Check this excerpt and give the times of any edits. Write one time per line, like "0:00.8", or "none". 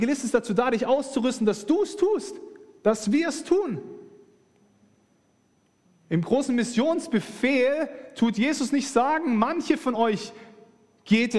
none